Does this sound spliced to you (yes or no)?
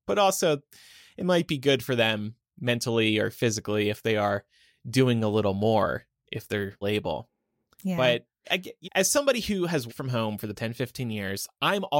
yes